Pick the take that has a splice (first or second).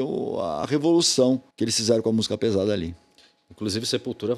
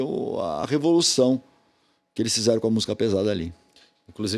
first